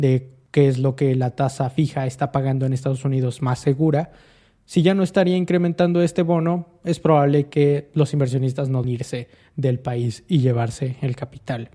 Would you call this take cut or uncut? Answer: cut